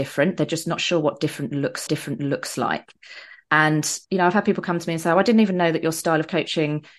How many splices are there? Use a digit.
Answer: 2